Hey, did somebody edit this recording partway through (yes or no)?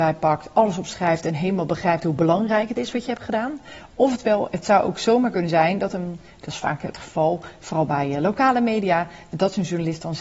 no